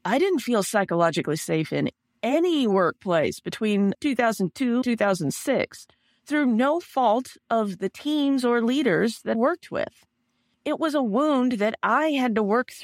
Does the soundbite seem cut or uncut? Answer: cut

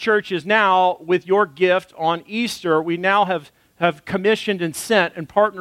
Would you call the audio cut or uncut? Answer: uncut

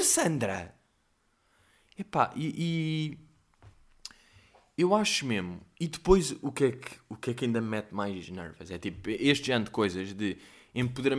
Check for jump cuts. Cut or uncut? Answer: uncut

